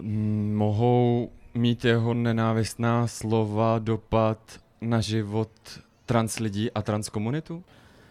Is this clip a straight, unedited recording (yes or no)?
yes